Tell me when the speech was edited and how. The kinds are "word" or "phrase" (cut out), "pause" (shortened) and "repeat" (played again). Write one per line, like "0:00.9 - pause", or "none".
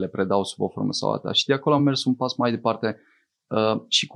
none